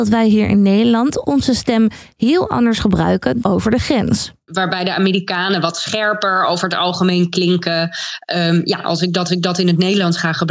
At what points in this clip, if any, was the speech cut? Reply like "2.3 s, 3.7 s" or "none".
3.4 s, 9.3 s